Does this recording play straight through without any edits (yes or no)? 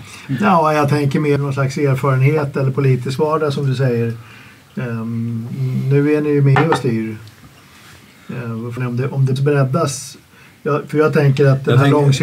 no